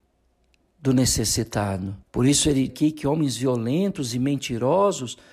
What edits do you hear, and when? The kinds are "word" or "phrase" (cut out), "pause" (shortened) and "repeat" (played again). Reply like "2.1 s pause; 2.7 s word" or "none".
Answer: 2.0 s pause; 2.7 s word